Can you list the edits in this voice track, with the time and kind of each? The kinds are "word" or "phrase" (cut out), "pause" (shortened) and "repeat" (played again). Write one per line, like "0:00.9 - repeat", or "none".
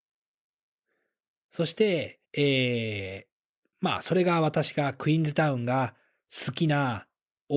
0:02.2 - pause
0:03.7 - pause

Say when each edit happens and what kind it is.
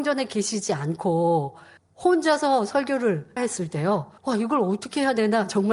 0:01.8 - pause
0:03.4 - word
0:04.2 - pause

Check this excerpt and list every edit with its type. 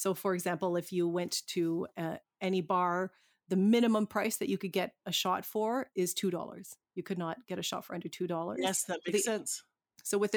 0:05.9 - word

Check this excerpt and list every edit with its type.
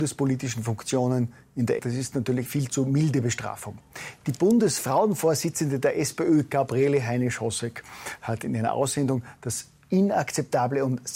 0:01.8 - phrase
0:02.5 - word

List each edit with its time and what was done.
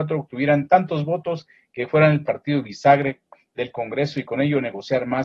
none

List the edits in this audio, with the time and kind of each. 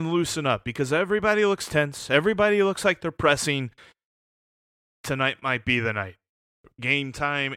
none

